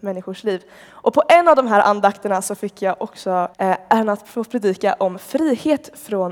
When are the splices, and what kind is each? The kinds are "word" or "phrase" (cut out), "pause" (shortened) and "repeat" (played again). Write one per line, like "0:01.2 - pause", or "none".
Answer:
0:03.5 - pause